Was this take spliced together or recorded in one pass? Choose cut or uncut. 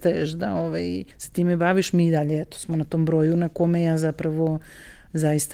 cut